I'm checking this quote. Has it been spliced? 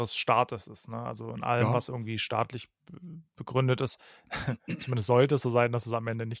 no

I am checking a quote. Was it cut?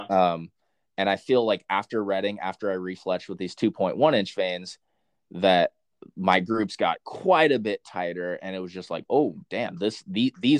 no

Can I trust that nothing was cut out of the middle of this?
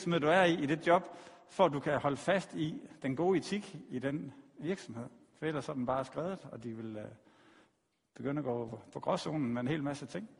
yes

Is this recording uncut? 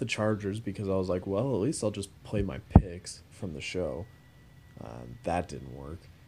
yes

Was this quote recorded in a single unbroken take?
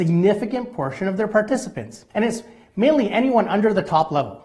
no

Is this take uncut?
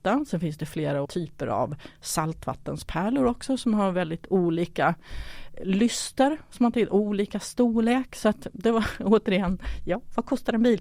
no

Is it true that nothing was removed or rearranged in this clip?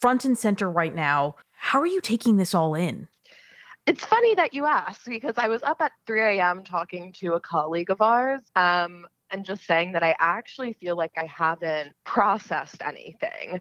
no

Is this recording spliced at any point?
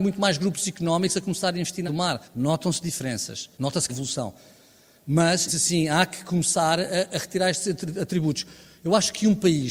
yes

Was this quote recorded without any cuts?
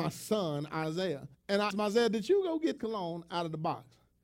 no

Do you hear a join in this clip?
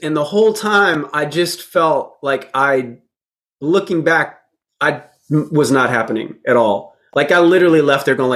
no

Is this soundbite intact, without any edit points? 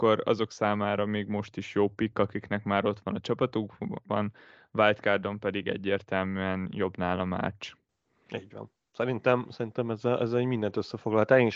yes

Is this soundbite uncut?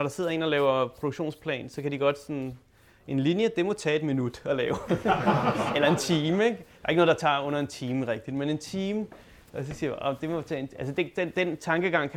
yes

